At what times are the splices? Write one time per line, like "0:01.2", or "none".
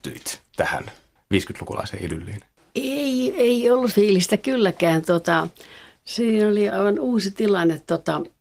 0:03.9
0:06.7